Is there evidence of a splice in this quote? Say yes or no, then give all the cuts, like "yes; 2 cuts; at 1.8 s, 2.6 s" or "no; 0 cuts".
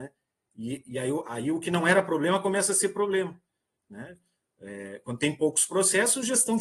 no; 0 cuts